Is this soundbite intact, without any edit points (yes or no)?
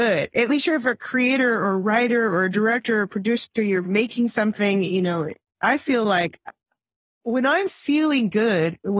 yes